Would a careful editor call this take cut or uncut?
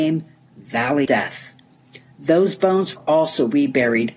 cut